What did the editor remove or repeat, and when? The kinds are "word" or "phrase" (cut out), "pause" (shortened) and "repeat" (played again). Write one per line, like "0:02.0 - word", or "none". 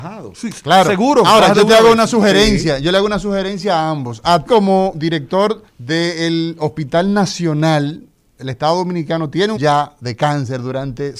0:04.5 - word
0:05.7 - pause
0:09.6 - word